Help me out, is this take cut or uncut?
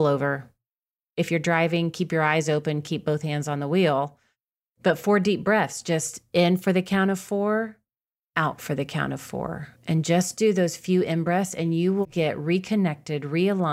cut